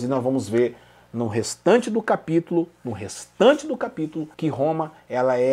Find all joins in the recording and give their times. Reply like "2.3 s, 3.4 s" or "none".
4.3 s